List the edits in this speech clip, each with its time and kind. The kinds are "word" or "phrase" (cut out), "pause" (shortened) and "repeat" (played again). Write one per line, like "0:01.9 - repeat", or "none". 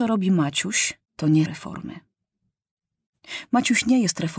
0:01.0 - pause
0:01.5 - word